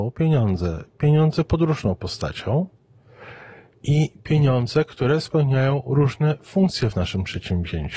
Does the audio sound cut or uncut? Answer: uncut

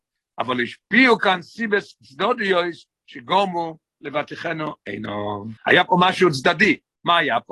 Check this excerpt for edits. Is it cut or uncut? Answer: cut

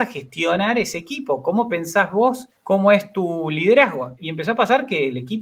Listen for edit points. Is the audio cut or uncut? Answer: cut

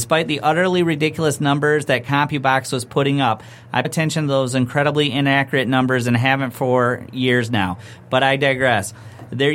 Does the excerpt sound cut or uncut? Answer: cut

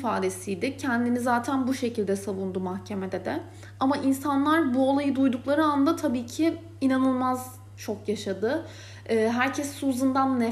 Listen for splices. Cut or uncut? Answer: uncut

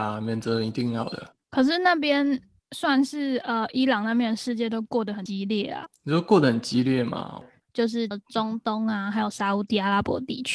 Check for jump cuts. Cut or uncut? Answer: uncut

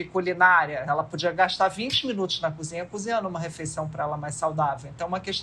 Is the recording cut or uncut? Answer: uncut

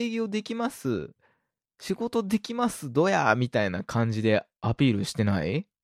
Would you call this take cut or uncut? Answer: uncut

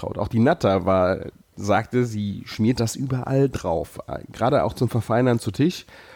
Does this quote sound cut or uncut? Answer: uncut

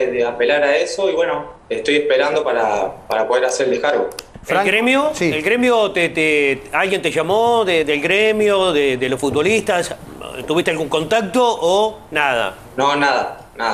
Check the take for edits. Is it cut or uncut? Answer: uncut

